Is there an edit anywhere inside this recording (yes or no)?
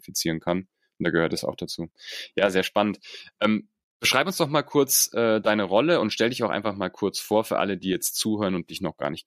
no